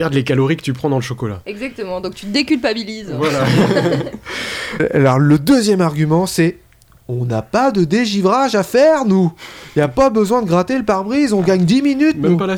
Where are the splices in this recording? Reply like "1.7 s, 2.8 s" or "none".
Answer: none